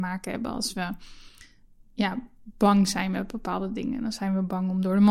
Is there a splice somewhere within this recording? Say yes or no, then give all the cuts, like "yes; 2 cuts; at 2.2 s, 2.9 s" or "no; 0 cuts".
no; 0 cuts